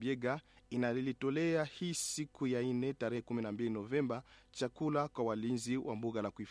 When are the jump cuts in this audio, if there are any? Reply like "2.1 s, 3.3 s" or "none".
none